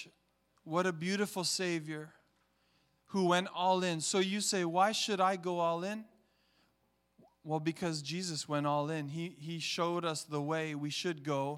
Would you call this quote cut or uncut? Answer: uncut